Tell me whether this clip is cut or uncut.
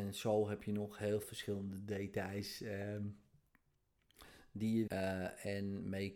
cut